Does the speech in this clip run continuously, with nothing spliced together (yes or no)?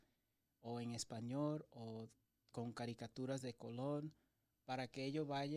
yes